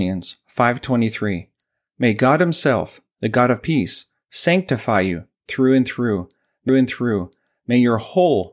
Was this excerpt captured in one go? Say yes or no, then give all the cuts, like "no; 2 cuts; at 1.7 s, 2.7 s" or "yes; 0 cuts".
no; 1 cut; at 6.7 s